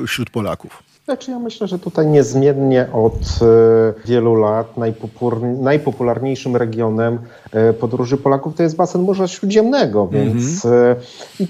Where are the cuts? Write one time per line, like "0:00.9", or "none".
0:01.0
0:04.0